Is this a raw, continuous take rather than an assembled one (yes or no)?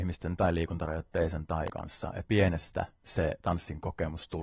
no